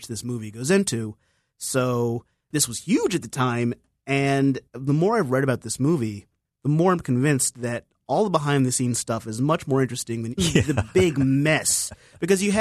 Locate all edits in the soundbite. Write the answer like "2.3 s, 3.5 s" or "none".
4.7 s, 10.4 s

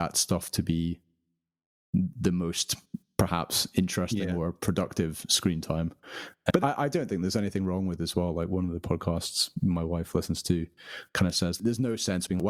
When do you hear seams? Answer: 6.6 s

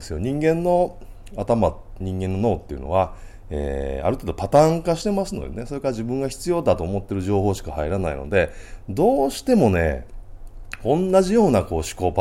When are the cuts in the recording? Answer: 2.0 s

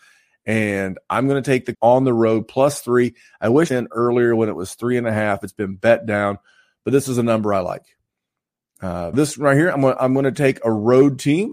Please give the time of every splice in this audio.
1.7 s, 3.7 s, 9.1 s

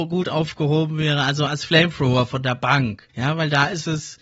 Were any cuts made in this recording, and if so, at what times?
3.1 s

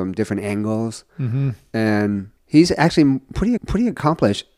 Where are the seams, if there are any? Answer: 2.4 s, 3.6 s

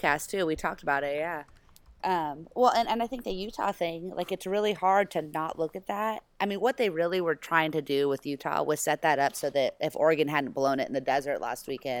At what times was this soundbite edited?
none

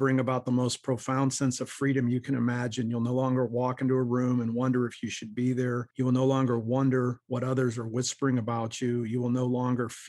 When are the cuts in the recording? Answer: 5.9 s

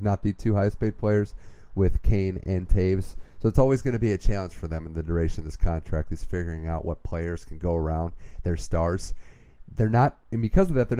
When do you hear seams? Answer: none

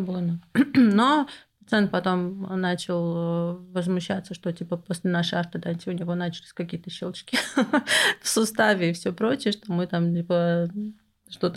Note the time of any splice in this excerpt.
none

